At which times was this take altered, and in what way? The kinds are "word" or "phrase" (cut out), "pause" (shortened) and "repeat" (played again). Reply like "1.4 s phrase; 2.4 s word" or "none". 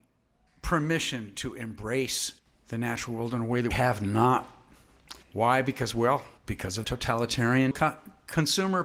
2.4 s pause; 3.7 s word; 5.2 s pause; 6.4 s pause; 6.8 s word; 7.7 s word